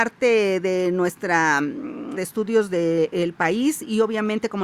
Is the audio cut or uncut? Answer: cut